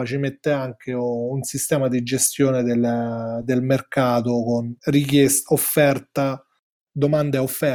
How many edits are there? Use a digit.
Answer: 1